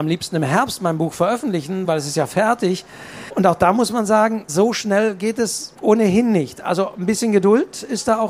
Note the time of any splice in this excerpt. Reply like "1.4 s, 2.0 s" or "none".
none